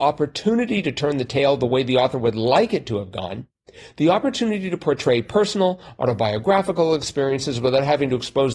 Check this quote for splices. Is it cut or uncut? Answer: uncut